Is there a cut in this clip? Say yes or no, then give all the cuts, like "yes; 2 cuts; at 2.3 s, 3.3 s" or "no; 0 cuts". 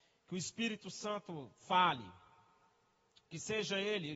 yes; 1 cut; at 1.6 s